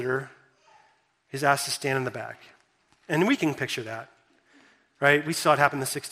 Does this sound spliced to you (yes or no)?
no